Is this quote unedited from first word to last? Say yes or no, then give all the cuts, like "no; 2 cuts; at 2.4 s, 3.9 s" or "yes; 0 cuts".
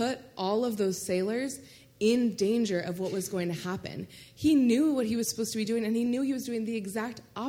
yes; 0 cuts